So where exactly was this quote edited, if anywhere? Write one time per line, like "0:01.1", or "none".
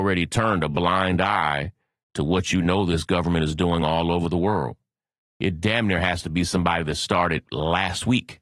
none

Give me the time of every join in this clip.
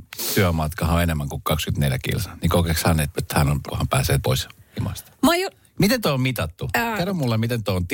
0:03.1
0:03.7
0:04.2

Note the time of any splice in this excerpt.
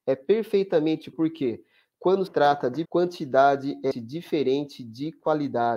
0:01.1
0:02.3
0:02.8
0:03.9

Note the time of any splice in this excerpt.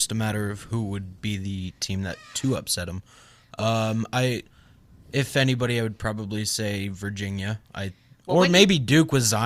none

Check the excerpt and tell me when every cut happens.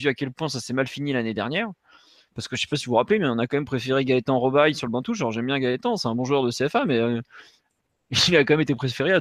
none

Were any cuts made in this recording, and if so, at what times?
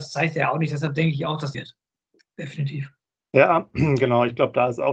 0:01.5

